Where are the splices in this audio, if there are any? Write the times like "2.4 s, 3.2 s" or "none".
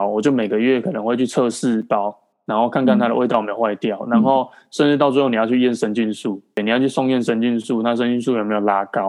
none